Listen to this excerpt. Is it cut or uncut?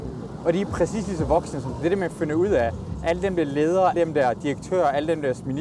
cut